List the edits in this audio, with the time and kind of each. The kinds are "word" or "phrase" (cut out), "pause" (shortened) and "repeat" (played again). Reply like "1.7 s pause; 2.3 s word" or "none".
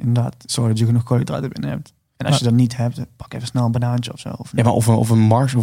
none